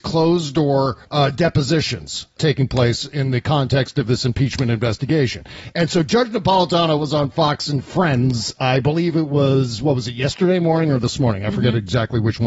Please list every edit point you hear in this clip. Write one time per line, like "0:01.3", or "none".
0:01.0

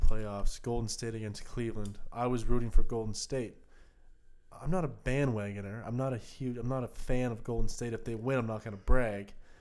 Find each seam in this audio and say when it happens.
none

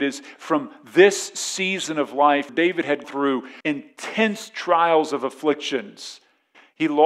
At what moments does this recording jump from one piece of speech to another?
0:02.5
0:03.0
0:03.6

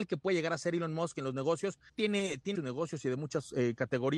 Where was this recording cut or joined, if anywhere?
0:01.9
0:02.5

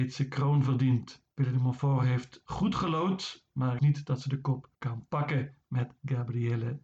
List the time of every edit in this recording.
0:01.3
0:03.8
0:04.7

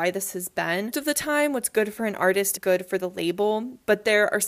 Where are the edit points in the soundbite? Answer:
0:00.9
0:02.6

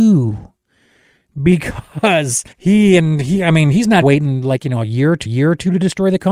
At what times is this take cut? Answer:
0:02.5
0:04.0
0:05.3

